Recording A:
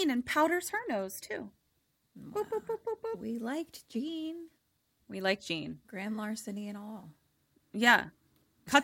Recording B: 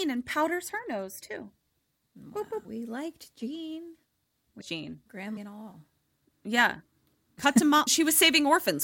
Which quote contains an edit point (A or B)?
B